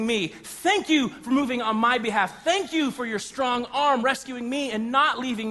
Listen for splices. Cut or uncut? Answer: cut